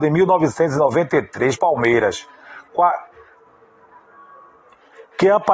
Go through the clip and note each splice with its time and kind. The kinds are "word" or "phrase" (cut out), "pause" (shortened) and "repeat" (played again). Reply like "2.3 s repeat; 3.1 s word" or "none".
1.6 s word